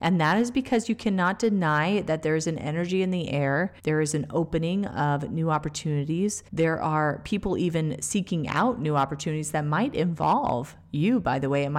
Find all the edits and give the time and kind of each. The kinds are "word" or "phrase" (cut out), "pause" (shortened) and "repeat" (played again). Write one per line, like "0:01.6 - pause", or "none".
0:03.8 - pause
0:06.5 - pause